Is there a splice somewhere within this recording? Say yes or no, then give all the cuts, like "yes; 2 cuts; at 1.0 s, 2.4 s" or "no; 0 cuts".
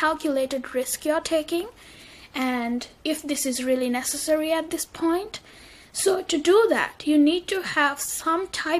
no; 0 cuts